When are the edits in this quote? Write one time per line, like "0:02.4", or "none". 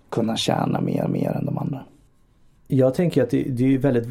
0:01.1
0:02.1